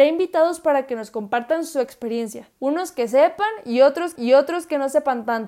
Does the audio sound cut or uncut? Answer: cut